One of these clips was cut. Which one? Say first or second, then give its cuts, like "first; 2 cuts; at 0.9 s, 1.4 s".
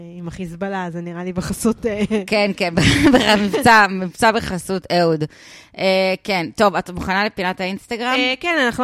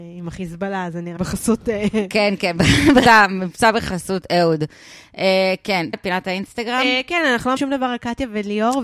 second; 4 cuts; at 1.2 s, 3.1 s, 5.9 s, 7.6 s